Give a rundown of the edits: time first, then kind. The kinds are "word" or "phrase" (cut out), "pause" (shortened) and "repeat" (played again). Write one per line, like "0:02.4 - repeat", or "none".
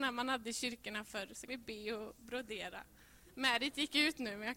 0:01.5 - word

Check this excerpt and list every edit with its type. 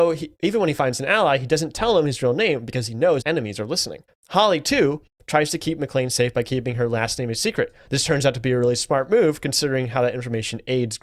0:03.2 - word
0:04.1 - pause

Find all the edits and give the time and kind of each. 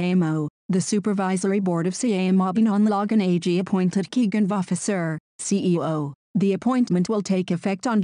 0:02.6 - word
0:04.5 - phrase

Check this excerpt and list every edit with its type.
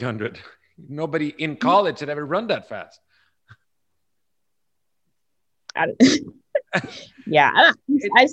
none

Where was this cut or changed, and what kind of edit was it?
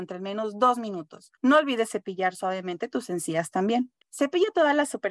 0:01.4 - pause
0:04.0 - pause

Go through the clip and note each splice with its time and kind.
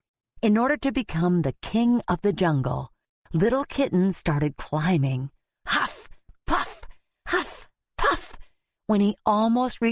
none

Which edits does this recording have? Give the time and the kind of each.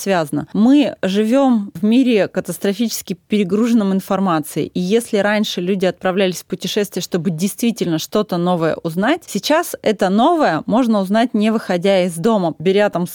none

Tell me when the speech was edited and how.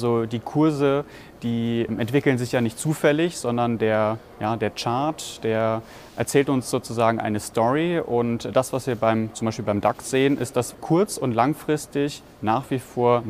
0:01.9 - word
0:06.1 - word
0:10.7 - word

